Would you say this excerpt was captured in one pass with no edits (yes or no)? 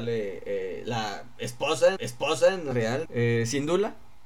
no